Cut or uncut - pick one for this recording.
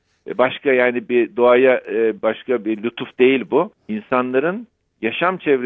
cut